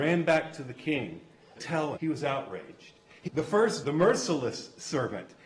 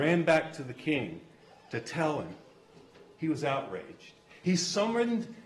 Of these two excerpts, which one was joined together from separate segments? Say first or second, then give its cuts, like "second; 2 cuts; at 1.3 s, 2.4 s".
first; 4 cuts; at 1.6 s, 2.0 s, 3.3 s, 3.8 s